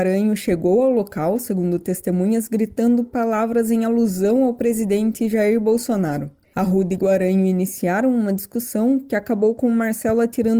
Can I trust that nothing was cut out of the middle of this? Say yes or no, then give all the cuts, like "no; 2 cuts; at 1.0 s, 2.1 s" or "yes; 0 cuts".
yes; 0 cuts